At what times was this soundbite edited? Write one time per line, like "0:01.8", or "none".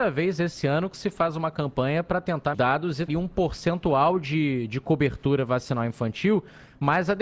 0:02.5
0:03.1